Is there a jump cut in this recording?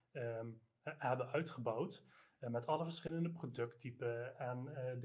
no; 0 cuts

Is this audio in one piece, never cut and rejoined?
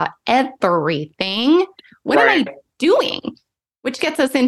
yes; 0 cuts

